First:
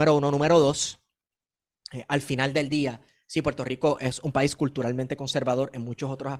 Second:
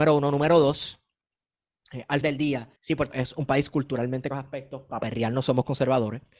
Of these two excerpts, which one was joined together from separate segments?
second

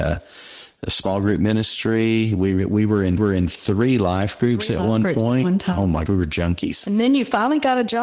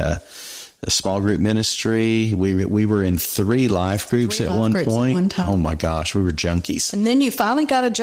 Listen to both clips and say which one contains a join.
first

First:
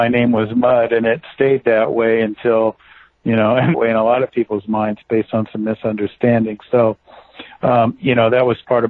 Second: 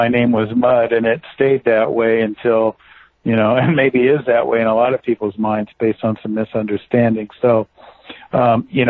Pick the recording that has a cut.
first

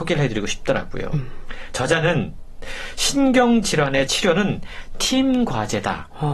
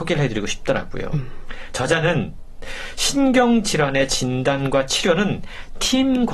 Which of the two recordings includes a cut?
first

